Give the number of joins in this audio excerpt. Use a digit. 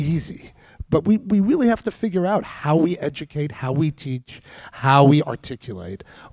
0